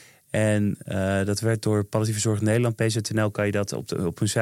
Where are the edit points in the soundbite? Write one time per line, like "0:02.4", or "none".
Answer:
none